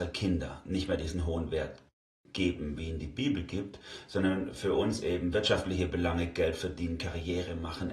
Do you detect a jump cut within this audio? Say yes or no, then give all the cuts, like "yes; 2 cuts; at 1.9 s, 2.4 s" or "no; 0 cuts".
no; 0 cuts